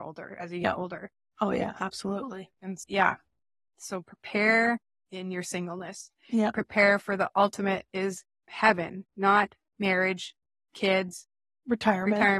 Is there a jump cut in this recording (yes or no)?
no